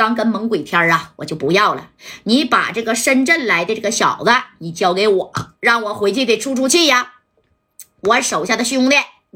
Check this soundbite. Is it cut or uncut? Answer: cut